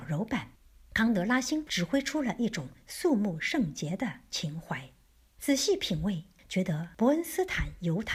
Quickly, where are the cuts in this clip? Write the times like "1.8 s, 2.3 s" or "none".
none